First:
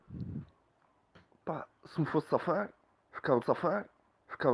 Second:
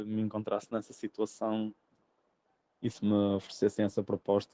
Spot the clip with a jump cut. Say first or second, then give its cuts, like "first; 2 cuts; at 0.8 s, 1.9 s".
first; 1 cut; at 3.4 s